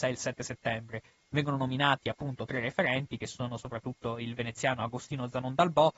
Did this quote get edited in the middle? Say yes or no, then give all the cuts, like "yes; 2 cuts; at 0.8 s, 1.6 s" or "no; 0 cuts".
no; 0 cuts